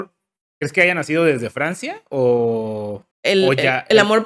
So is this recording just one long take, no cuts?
no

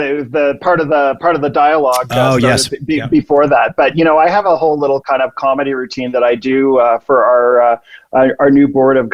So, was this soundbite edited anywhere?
no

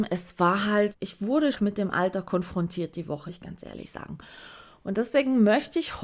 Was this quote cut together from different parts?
yes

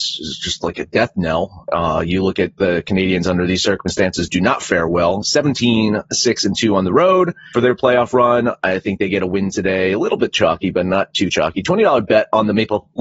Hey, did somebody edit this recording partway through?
yes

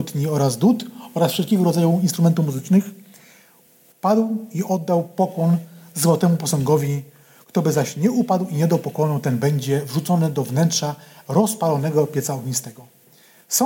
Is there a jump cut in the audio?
no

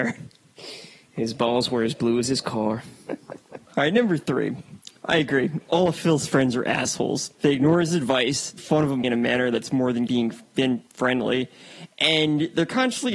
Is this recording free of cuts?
no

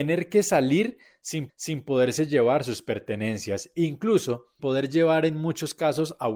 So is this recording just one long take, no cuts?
no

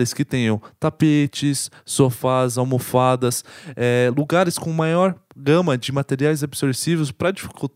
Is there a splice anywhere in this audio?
no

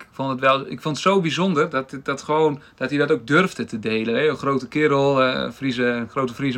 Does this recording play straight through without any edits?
yes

